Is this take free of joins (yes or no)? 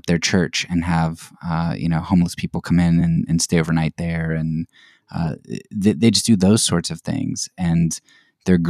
yes